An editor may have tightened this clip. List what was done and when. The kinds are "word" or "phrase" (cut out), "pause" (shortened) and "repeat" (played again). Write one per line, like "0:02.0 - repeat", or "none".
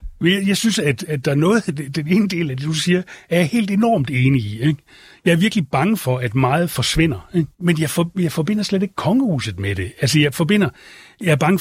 0:07.5 - pause